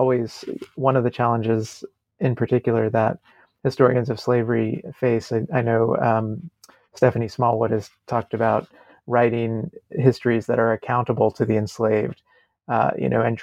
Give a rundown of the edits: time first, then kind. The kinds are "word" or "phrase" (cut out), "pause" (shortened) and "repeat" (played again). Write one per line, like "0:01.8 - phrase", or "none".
none